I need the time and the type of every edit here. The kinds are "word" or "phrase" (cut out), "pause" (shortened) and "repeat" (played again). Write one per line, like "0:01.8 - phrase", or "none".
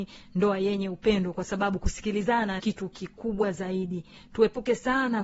0:02.6 - word